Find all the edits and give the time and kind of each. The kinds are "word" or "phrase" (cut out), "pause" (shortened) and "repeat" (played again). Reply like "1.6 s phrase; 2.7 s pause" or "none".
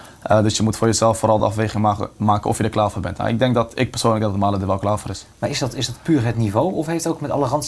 none